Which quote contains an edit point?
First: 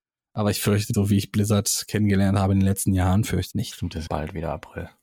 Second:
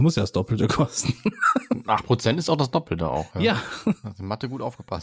first; 3 cuts; at 0.9 s, 3.5 s, 4.1 s

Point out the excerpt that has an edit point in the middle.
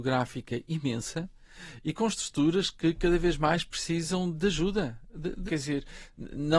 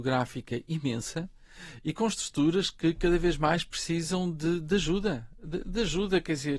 first; 2 cuts; at 4.3 s, 5.5 s

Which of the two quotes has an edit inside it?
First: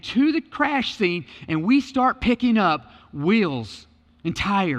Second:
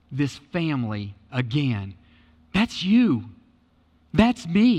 second; 1 cut; at 1.3 s

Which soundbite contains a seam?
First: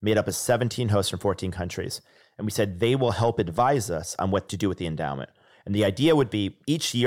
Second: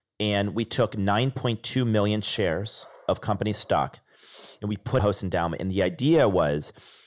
second; 1 cut; at 5.0 s

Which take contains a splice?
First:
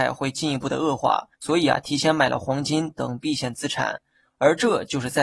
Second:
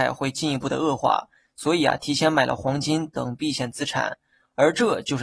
first; 1 cut; at 1.3 s

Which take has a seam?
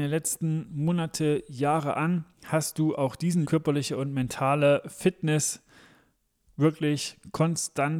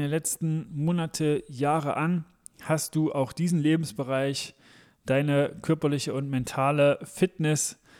first; 2 cuts; at 2.3 s, 3.4 s

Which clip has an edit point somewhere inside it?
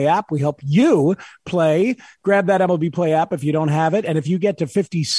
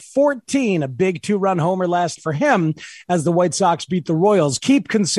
second; 1 cut; at 2.2 s

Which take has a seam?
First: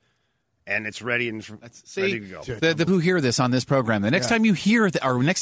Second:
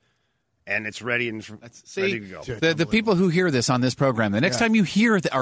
first; 1 cut; at 2.9 s

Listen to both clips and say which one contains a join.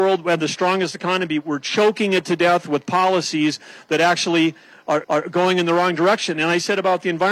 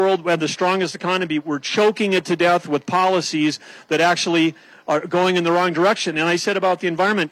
first; 1 cut; at 5.0 s

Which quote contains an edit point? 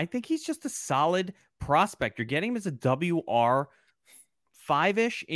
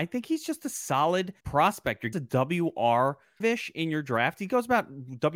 second; 3 cuts; at 1.4 s, 2.1 s, 3.4 s

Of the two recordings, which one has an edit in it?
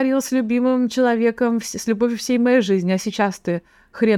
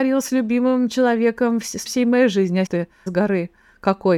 second; 3 cuts; at 1.9 s, 2.7 s, 3.1 s

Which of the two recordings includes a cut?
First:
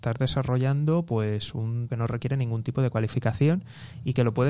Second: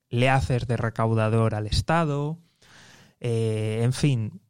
first; 1 cut; at 1.9 s

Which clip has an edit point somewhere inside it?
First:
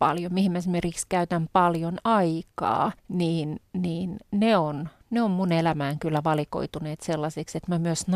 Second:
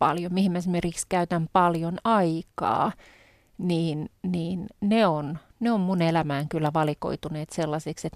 first; 1 cut; at 3.0 s

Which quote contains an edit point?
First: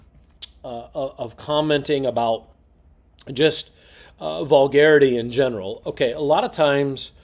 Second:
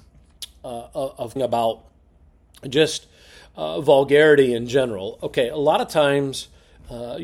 second; 1 cut; at 1.4 s

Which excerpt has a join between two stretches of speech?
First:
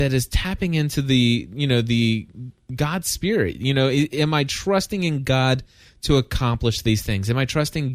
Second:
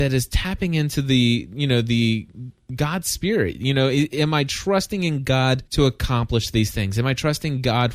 second; 1 cut; at 5.7 s

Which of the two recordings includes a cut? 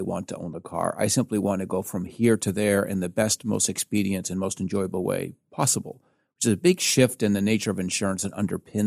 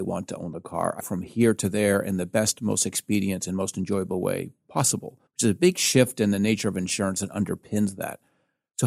second; 2 cuts; at 1.0 s, 5.3 s

